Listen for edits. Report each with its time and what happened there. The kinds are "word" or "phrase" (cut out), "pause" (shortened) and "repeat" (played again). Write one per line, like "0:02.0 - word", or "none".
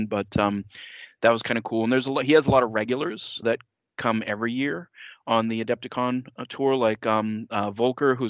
0:03.4 - word

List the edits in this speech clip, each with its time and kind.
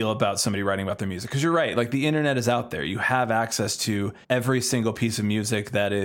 0:04.2 - pause

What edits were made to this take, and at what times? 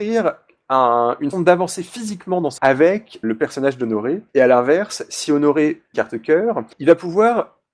0:01.3 - word
0:02.6 - word
0:03.2 - word
0:04.3 - pause
0:05.9 - phrase
0:06.7 - pause

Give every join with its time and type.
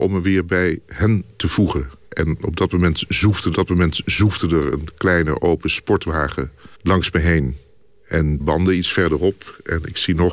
0:02.1 - pause
0:03.5 - repeat
0:06.7 - pause
0:08.4 - phrase

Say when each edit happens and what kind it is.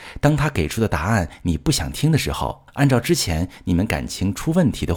0:02.7 - pause

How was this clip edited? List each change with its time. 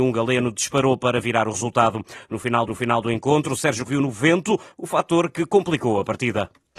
0:02.7 - repeat
0:03.8 - word

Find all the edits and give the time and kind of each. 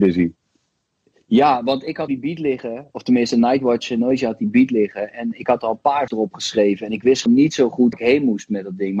0:02.1 - word
0:06.1 - word
0:07.3 - word
0:07.9 - word

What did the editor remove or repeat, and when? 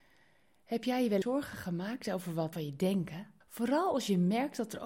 0:01.2 - word
0:02.5 - word
0:03.4 - pause

